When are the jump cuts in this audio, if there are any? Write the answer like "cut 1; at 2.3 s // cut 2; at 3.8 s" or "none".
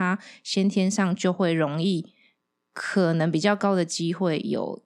none